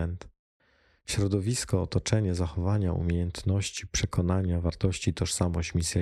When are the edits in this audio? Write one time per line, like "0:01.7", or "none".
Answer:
none